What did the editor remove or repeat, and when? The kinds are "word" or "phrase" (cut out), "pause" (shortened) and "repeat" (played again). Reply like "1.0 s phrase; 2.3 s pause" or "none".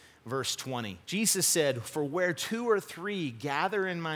1.0 s pause